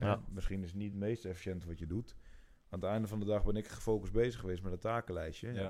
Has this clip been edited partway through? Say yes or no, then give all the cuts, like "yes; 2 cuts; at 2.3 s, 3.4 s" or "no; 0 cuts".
no; 0 cuts